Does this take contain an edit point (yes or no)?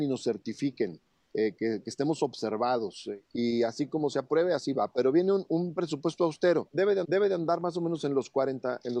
yes